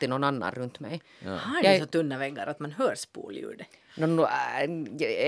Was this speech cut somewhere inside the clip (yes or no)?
no